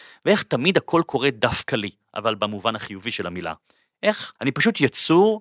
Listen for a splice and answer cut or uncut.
cut